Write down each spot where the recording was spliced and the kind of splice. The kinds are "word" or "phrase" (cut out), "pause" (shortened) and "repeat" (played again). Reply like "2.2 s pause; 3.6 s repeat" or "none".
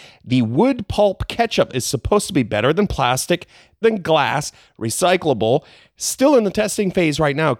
1.7 s word; 3.8 s word

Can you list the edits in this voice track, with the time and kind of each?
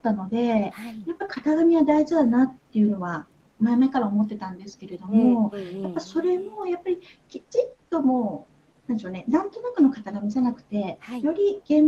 none

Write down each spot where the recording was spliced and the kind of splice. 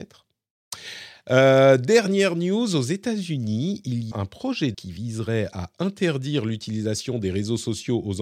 4.1 s word; 4.7 s word

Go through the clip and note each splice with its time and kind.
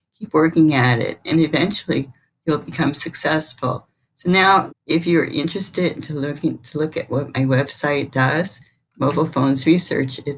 4.7 s word

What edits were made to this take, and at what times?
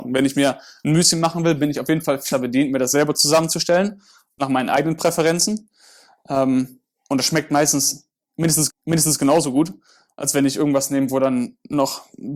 2.3 s word; 8.7 s repeat

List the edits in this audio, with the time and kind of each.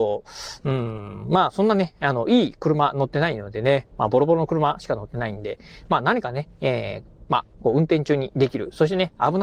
7.5 s pause

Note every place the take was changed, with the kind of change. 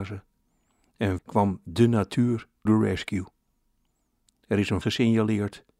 1.2 s word; 2.7 s word; 4.8 s word

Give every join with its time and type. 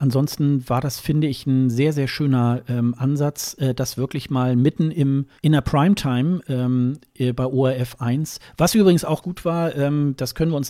5.4 s pause; 9.2 s word

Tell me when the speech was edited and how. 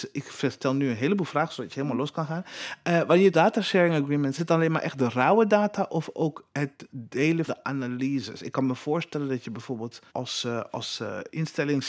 3.3 s word; 4.4 s phrase; 7.5 s word; 10.1 s pause

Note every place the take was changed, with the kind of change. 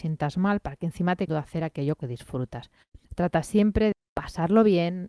1.3 s phrase; 2.0 s phrase; 3.0 s pause; 3.9 s word

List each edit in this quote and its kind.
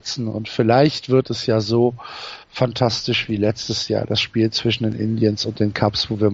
2.4 s pause

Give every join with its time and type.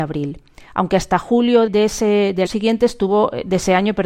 1.7 s word; 2.5 s word

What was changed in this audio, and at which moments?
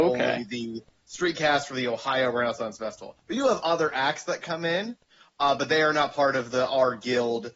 none

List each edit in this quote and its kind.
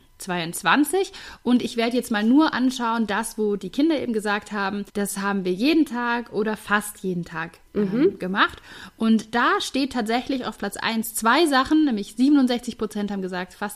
4.9 s pause; 7.7 s pause

